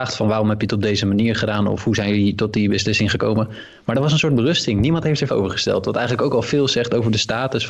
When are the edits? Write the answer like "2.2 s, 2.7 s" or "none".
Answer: 5.3 s